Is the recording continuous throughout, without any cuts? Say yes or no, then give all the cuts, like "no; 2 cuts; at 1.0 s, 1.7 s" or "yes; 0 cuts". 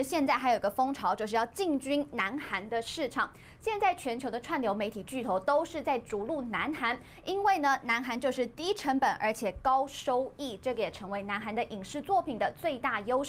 yes; 0 cuts